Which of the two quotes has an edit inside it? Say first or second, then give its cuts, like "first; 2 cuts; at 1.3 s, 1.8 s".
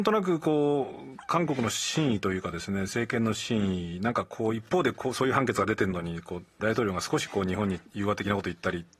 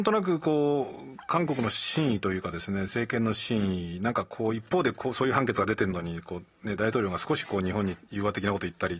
first; 1 cut; at 6.6 s